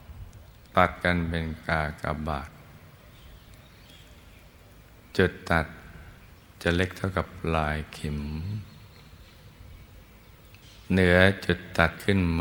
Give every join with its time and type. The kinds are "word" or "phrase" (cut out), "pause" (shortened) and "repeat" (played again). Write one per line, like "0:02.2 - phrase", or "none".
none